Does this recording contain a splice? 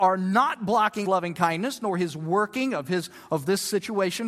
yes; 1 cut; at 1.0 s

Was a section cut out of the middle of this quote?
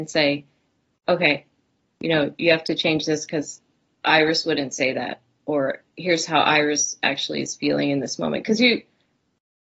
no; 0 cuts

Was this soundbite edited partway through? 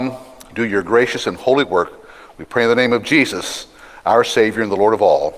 no; 0 cuts

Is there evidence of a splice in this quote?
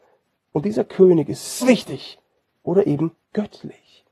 yes; 1 cut; at 1.6 s

